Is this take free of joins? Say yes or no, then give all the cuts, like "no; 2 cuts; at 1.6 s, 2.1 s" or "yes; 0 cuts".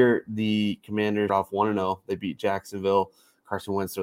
no; 1 cut; at 1.3 s